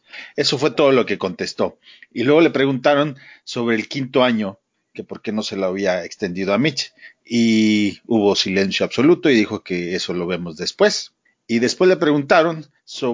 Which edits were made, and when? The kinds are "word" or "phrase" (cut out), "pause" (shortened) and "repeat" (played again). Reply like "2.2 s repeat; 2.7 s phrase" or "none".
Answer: none